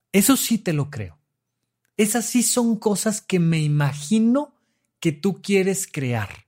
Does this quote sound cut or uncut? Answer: uncut